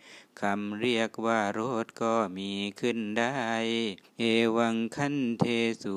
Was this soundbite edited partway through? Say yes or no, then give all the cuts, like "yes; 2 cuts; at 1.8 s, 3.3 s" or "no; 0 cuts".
yes; 1 cut; at 4.0 s